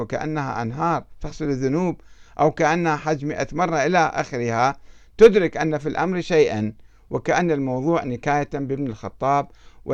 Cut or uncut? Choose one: uncut